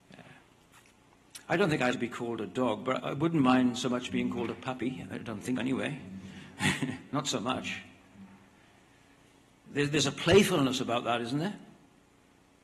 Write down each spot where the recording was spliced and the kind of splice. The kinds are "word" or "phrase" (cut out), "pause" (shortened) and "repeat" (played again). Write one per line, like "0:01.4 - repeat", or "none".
0:01.9 - word
0:03.0 - word
0:05.6 - word